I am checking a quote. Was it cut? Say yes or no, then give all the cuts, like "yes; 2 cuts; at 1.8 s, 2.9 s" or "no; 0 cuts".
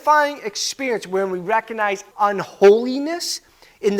yes; 1 cut; at 2.1 s